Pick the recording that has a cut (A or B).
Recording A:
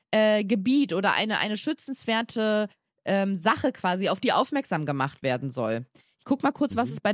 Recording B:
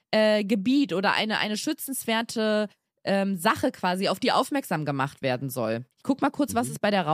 B